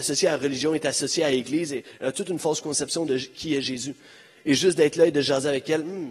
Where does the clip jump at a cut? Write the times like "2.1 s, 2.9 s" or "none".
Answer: none